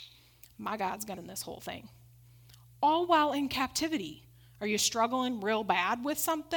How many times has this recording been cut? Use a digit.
1